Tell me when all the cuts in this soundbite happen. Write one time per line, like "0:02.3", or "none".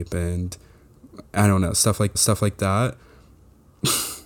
0:02.1